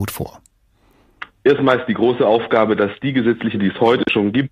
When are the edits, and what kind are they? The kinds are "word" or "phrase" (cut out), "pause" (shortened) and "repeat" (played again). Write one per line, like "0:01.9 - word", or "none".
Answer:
0:03.6 - word